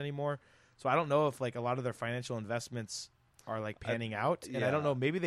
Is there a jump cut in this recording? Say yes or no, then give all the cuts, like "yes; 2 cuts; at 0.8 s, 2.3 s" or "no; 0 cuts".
no; 0 cuts